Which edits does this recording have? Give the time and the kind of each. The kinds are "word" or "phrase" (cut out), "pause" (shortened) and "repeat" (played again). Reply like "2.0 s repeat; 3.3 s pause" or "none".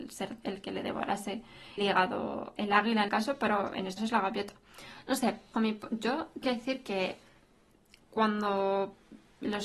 1.8 s word; 2.6 s word; 3.1 s word; 4.0 s word; 5.5 s word; 6.4 s word